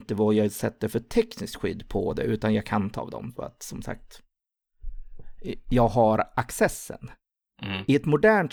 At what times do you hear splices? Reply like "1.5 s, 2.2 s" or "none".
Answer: 3.0 s